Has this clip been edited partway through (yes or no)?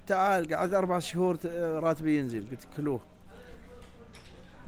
no